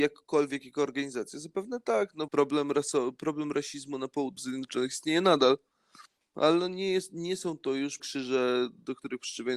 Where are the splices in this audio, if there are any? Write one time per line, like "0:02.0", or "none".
0:02.3
0:04.4
0:08.0